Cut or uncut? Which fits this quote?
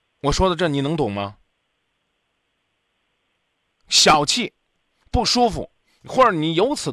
uncut